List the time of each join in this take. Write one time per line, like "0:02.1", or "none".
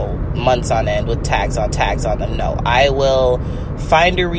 0:01.7